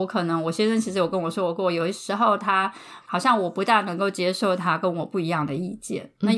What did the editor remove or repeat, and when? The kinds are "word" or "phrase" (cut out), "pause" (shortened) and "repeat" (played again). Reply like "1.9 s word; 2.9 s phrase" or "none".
3.0 s pause

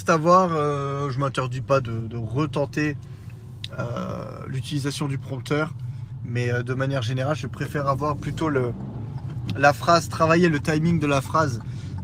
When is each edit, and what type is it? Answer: none

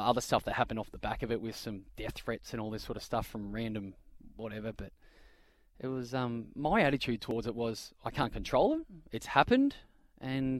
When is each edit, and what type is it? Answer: none

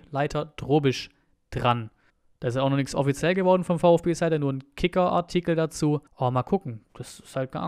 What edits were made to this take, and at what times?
2.1 s pause; 6.1 s pause

